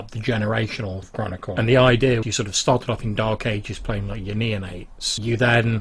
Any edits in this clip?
yes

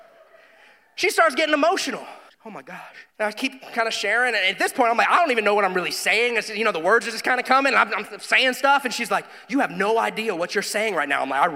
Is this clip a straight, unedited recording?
no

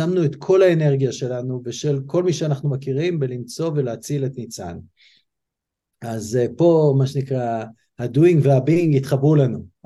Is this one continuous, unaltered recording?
yes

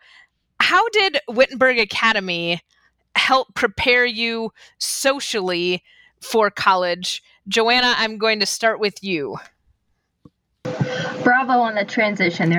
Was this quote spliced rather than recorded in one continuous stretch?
no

